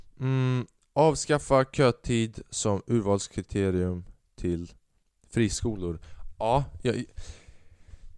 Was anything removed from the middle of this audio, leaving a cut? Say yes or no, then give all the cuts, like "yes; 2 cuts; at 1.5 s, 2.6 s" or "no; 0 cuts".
no; 0 cuts